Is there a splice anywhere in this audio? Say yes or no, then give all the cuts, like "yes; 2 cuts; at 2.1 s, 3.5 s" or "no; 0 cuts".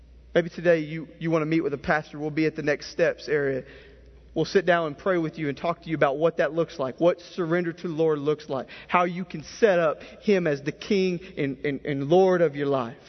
no; 0 cuts